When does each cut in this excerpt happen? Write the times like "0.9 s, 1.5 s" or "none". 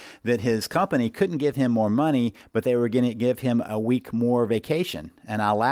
none